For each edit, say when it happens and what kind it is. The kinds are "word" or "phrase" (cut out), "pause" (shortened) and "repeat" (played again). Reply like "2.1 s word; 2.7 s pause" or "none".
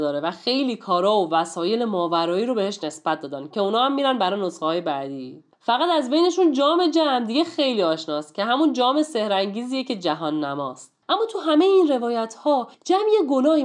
5.5 s pause; 11.0 s pause; 12.7 s pause